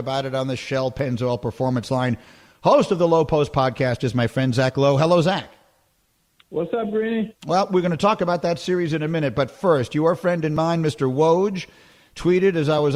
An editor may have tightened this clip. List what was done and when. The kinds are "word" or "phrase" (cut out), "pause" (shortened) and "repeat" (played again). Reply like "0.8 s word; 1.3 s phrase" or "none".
7.4 s pause